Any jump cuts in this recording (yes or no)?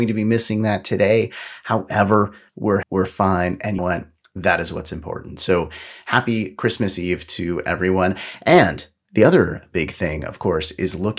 yes